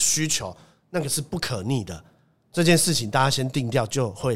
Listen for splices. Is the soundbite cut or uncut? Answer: uncut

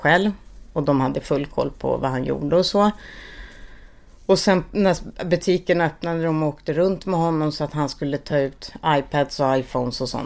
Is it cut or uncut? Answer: uncut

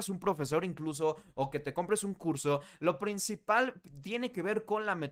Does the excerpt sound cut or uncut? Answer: uncut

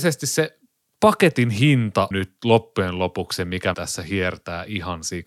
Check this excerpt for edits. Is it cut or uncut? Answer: cut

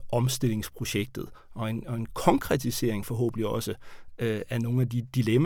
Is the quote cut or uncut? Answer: uncut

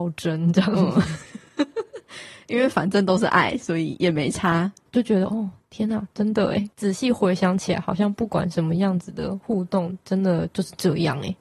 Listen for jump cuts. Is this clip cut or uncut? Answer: uncut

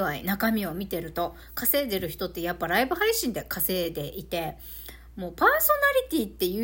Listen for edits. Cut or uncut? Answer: uncut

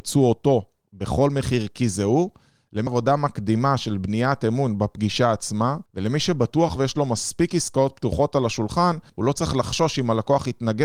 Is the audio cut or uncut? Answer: cut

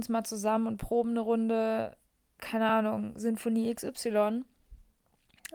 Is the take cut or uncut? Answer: uncut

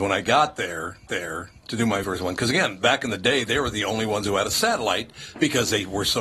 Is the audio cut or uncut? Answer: cut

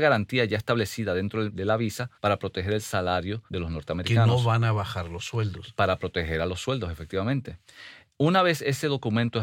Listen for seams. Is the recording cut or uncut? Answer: cut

